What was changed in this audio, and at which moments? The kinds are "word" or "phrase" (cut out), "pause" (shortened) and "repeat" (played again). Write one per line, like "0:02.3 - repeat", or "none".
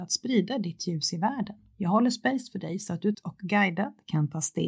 0:01.7 - pause
0:03.1 - word